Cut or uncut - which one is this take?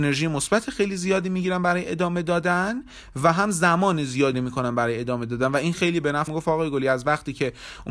cut